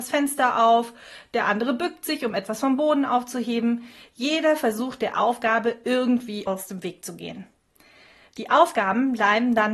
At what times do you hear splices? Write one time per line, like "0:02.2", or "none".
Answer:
none